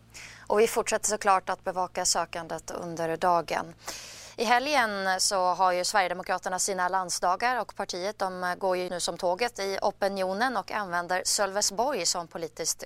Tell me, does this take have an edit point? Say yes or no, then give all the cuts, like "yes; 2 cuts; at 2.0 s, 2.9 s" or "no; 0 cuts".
yes; 1 cut; at 8.9 s